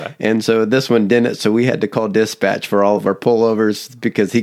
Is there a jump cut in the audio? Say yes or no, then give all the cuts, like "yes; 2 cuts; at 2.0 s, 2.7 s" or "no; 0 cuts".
no; 0 cuts